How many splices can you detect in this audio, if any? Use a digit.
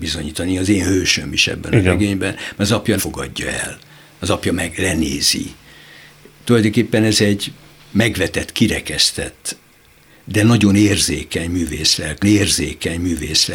2